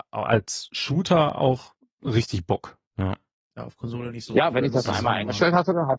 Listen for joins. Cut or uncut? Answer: cut